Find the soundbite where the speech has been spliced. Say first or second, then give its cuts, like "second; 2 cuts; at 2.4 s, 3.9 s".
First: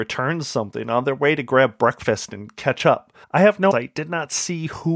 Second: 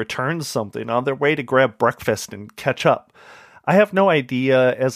first; 2 cuts; at 3.2 s, 3.7 s